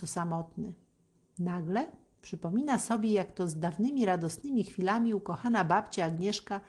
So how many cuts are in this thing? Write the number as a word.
zero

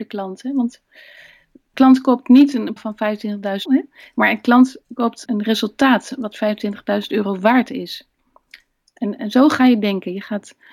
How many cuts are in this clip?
four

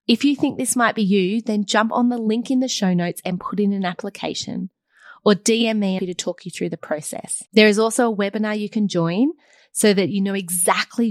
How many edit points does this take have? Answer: two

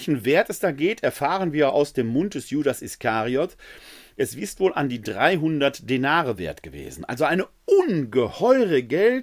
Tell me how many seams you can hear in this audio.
zero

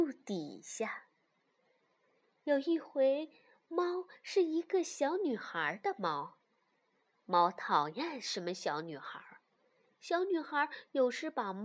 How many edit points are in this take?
zero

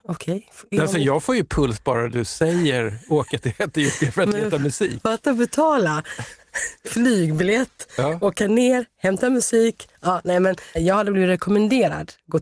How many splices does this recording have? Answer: zero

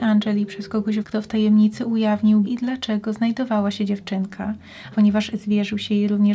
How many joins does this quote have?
three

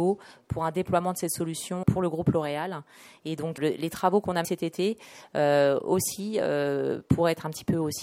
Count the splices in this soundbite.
three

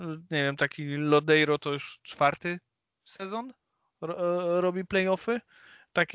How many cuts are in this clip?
zero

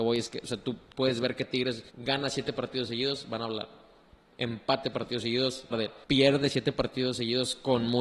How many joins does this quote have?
four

